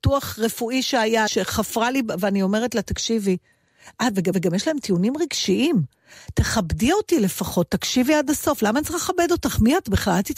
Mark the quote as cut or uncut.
cut